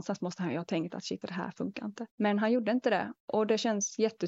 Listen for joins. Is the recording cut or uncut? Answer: cut